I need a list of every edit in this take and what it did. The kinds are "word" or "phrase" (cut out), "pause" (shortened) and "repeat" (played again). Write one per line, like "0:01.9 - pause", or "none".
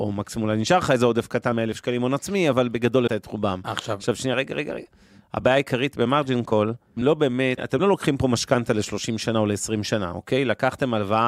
0:01.5 - word
0:03.1 - word
0:07.0 - word
0:07.6 - word